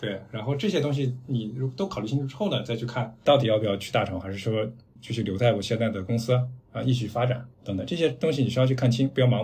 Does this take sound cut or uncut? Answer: cut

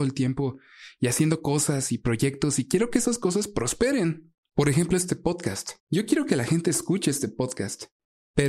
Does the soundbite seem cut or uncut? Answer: cut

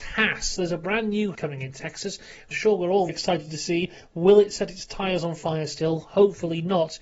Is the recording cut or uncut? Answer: cut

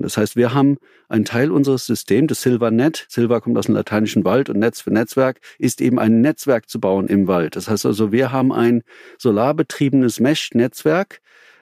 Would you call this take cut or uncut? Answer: uncut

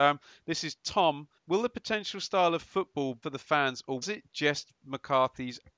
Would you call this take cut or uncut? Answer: cut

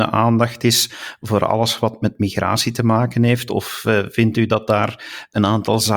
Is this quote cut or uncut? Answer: uncut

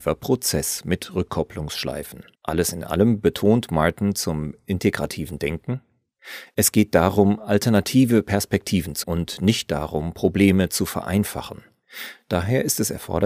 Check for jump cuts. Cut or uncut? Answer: cut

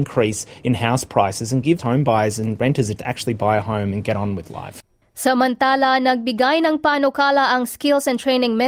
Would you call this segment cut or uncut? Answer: cut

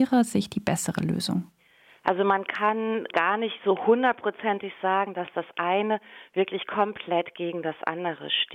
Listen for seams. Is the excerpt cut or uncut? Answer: cut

